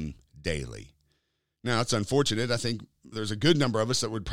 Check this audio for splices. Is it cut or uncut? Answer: cut